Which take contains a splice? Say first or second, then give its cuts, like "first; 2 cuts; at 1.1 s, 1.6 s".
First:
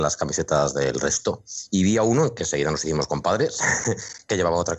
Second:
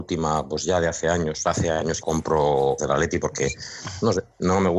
second; 2 cuts; at 2.0 s, 2.8 s